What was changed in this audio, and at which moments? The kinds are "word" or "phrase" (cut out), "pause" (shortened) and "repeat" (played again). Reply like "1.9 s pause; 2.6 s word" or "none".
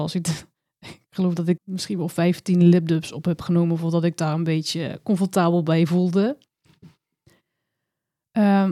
1.6 s word